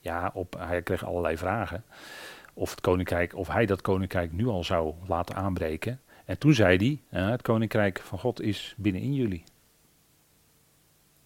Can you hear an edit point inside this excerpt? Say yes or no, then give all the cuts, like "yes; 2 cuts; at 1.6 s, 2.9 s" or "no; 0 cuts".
no; 0 cuts